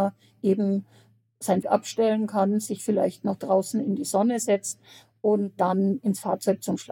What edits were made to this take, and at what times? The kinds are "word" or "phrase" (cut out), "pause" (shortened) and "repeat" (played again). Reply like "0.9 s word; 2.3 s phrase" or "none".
1.6 s word